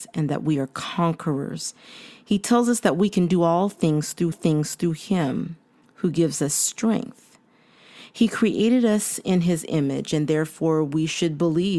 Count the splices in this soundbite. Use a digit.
1